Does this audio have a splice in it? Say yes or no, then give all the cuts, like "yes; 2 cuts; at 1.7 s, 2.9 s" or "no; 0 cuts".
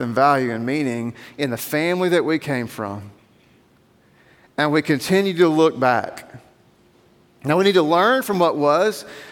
no; 0 cuts